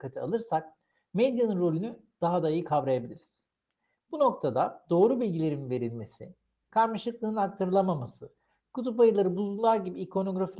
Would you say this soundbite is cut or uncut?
uncut